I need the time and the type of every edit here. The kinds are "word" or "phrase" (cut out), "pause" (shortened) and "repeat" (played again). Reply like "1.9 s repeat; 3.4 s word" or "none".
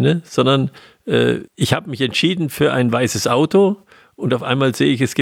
1.5 s pause

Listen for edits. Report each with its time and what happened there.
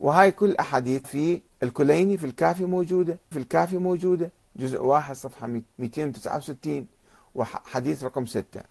1.0 s word; 1.5 s pause; 3.3 s repeat; 5.7 s pause

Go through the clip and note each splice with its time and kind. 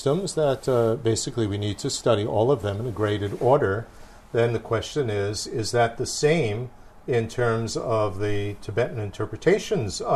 none

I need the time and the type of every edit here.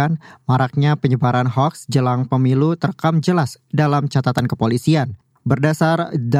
none

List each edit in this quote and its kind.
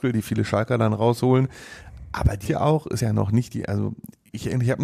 2.4 s word; 3.0 s word

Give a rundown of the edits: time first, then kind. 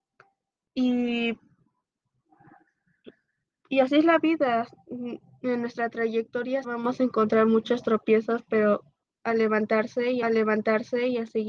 6.6 s word; 9.0 s pause; 10.2 s repeat

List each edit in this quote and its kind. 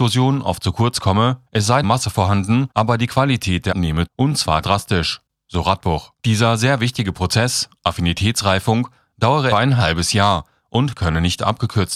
1.5 s pause; 1.8 s phrase; 2.7 s pause; 3.7 s word; 4.1 s word; 4.6 s word; 6.2 s pause; 9.5 s word

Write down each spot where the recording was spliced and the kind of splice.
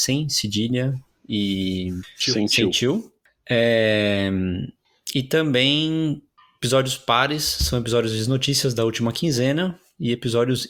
none

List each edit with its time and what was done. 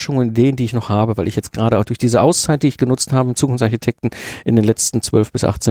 none

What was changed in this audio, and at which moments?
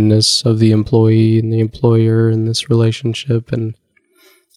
none

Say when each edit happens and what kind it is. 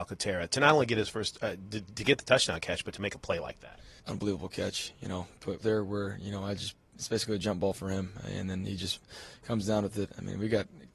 4.0 s pause; 5.6 s phrase

